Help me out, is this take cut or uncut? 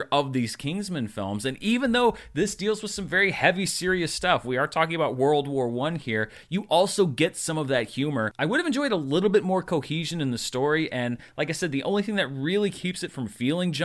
uncut